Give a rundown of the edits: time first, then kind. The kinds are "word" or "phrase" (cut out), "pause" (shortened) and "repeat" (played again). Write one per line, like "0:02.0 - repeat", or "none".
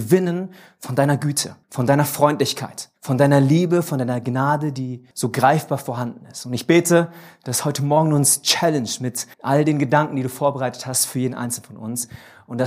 0:01.6 - pause
0:03.0 - pause
0:05.1 - pause
0:09.3 - pause